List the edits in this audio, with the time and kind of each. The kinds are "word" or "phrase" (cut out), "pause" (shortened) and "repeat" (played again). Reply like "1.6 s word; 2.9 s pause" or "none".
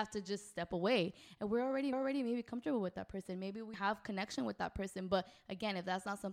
1.9 s repeat; 3.7 s word